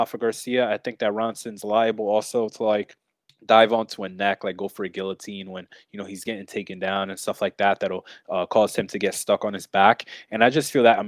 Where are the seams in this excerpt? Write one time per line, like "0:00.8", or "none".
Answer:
none